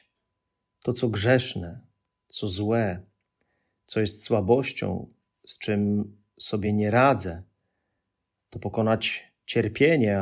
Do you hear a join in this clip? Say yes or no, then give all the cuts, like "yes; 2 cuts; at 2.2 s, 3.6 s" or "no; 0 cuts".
no; 0 cuts